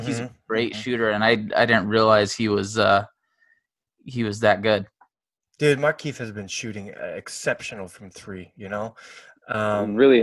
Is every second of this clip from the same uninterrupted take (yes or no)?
yes